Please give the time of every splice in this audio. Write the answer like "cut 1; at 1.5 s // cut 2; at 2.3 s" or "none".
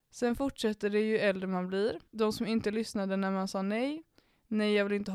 cut 1; at 2.1 s